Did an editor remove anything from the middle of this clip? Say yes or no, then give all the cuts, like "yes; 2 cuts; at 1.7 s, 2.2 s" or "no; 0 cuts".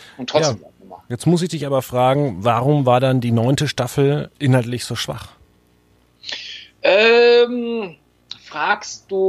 no; 0 cuts